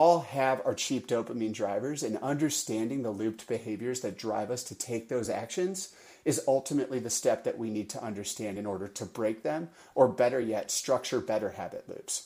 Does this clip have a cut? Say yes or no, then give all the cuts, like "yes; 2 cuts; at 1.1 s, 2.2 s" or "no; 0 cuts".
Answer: no; 0 cuts